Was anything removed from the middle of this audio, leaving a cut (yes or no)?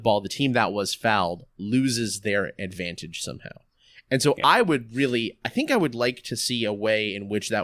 no